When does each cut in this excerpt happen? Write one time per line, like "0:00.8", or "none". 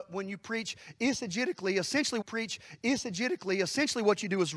0:02.2